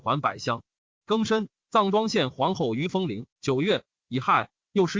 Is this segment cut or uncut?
cut